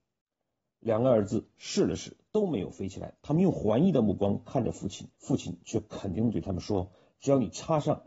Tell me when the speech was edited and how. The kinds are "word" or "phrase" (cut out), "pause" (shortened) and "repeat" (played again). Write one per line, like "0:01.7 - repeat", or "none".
0:05.1 - pause

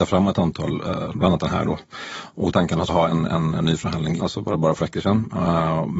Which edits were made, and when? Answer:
0:01.1 - word
0:02.5 - phrase
0:02.9 - word
0:04.2 - phrase
0:04.8 - word

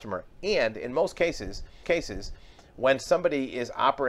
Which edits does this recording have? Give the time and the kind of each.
0:01.8 - repeat

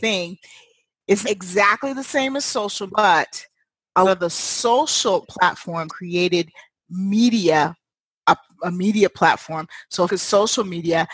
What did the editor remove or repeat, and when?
0:01.2 - word
0:02.9 - word
0:04.0 - word
0:05.2 - word
0:05.9 - word
0:10.1 - word

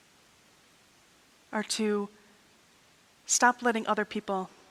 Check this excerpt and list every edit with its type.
none

